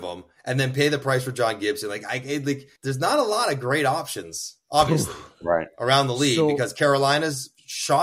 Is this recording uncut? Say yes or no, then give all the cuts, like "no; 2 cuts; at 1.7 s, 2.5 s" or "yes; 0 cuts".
no; 1 cut; at 2.8 s